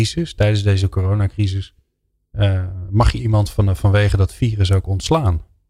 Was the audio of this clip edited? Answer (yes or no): no